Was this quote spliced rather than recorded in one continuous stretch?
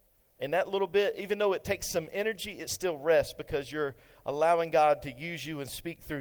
no; 0 cuts

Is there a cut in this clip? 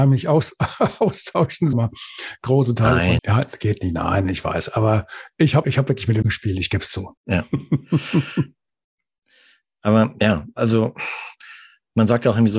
yes; 5 cuts; at 1.7 s, 3.2 s, 5.6 s, 6.2 s, 7.2 s

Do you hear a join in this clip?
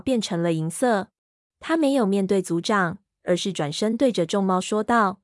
yes; 1 cut; at 1.2 s

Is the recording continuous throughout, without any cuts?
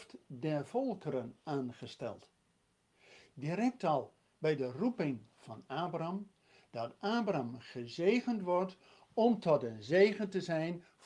yes; 0 cuts

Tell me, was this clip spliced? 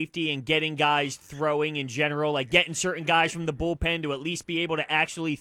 no; 0 cuts

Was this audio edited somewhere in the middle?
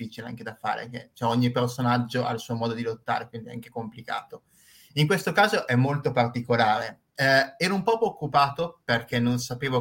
no; 0 cuts

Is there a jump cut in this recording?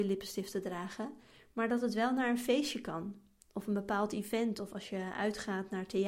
no; 0 cuts

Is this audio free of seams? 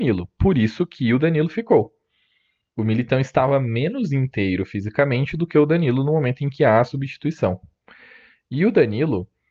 yes; 0 cuts

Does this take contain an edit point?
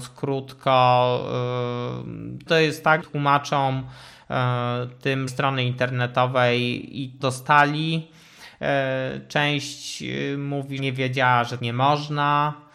yes; 6 cuts; at 2.5 s, 3.0 s, 5.3 s, 7.2 s, 10.8 s, 11.6 s

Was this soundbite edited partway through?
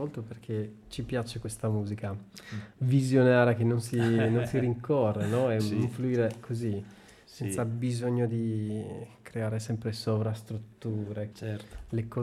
yes; 2 cuts; at 5.6 s, 11.3 s

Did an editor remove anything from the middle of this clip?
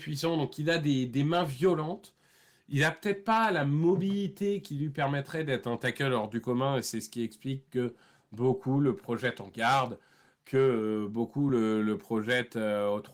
no; 0 cuts

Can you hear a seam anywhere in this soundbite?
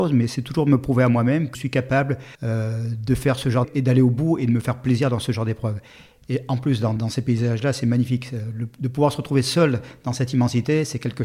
yes; 4 cuts; at 1.5 s, 2.3 s, 3.6 s, 7.0 s

